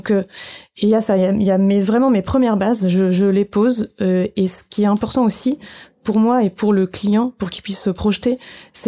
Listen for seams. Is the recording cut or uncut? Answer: uncut